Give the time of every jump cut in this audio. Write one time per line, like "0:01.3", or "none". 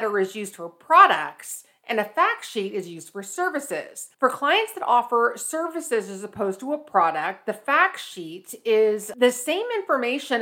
0:04.1

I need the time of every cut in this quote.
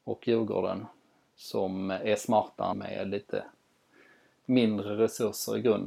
0:02.7

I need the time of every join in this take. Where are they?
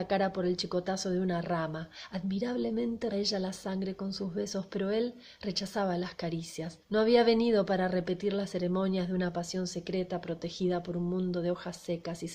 0:03.1
0:06.8

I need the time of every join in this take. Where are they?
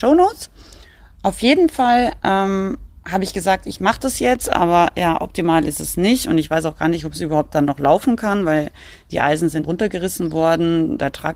0:09.6

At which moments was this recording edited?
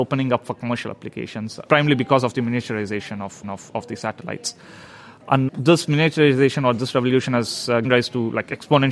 0:01.7
0:03.4
0:05.5
0:07.8

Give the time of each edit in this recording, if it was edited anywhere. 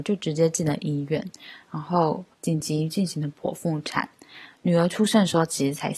0:02.3

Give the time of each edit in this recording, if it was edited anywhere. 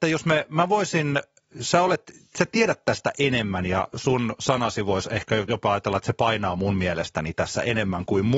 none

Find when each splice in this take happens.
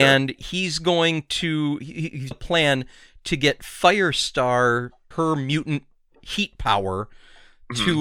0:02.3
0:05.1

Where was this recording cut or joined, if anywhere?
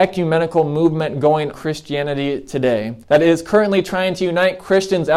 0:01.5
0:03.0

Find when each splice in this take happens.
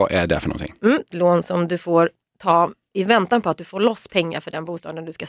0:01.1

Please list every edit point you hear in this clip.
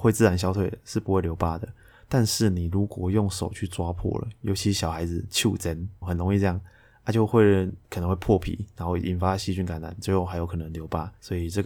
0:06.0
0:07.8

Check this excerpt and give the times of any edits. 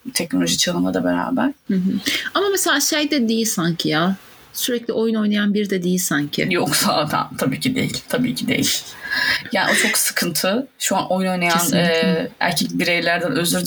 none

